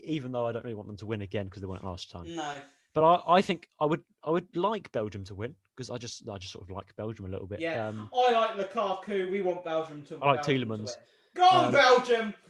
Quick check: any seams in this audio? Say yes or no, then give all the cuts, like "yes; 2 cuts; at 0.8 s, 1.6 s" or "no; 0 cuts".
no; 0 cuts